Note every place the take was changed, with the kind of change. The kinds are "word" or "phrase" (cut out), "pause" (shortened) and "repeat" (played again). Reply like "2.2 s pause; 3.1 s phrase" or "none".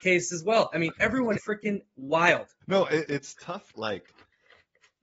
1.4 s word; 2.6 s pause; 3.1 s word; 3.7 s word